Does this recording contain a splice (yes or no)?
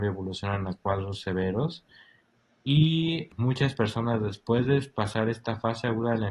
no